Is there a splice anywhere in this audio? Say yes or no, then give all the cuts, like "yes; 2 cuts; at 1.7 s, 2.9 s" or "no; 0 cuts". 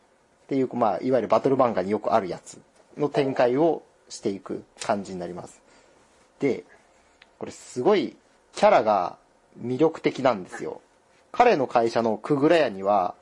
yes; 1 cut; at 2.7 s